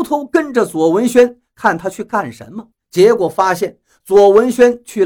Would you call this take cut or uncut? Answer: cut